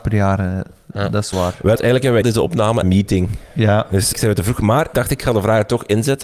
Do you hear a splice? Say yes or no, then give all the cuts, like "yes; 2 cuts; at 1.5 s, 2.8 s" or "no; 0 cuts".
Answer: yes; 6 cuts; at 1.3 s, 1.8 s, 2.2 s, 2.8 s, 4.1 s, 4.9 s